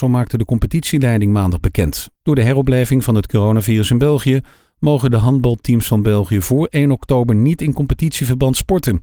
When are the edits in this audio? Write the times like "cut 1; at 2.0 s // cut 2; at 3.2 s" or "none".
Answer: none